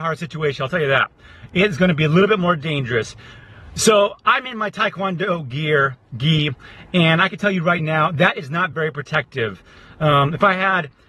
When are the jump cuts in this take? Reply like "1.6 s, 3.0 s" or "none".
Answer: none

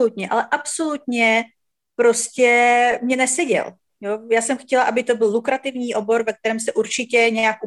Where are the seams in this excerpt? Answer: none

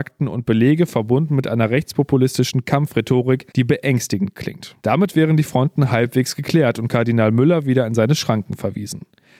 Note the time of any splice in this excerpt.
3.5 s, 4.8 s

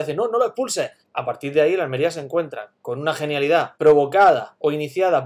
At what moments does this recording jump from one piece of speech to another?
1.0 s, 3.7 s

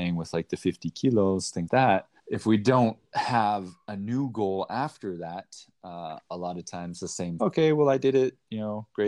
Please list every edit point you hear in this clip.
1.7 s, 2.2 s, 7.4 s

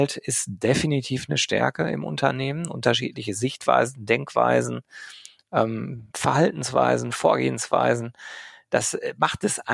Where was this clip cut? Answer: 6.1 s

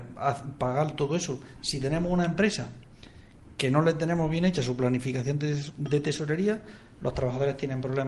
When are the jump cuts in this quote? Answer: none

